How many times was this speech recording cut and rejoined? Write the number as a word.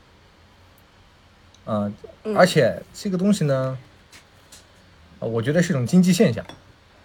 zero